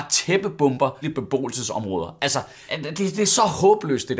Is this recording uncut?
no; 2 cuts; at 1.0 s, 2.7 s

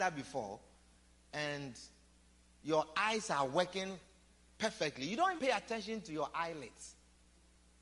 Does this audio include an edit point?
yes; 1 cut; at 5.4 s

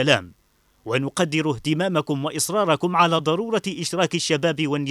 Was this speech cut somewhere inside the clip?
no; 0 cuts

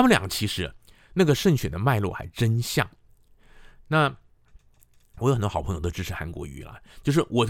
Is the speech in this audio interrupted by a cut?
no; 0 cuts

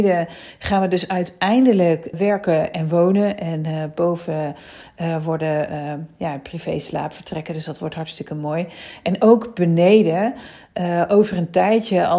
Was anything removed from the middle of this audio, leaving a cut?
yes; 1 cut; at 2.1 s

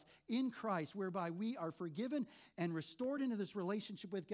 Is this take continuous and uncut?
yes; 0 cuts

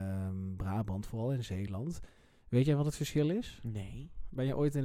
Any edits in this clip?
no; 0 cuts

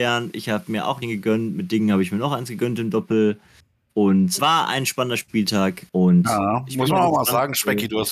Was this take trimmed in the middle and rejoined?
yes; 3 cuts; at 1.0 s, 4.4 s, 5.9 s

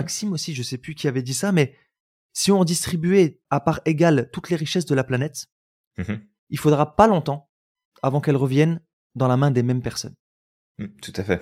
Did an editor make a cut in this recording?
no; 0 cuts

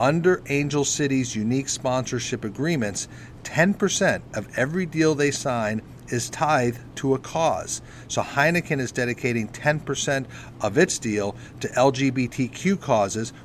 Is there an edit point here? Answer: no; 0 cuts

